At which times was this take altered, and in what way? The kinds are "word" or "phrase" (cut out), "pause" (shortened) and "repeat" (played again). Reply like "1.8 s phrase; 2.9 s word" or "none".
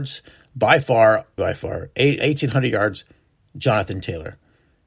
1.4 s word; 2.2 s word